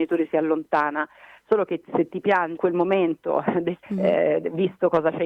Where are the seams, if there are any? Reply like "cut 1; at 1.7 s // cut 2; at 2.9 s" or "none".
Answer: cut 1; at 2.6 s // cut 2; at 3.8 s